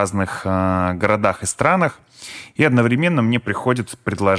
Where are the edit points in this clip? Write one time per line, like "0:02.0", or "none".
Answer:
none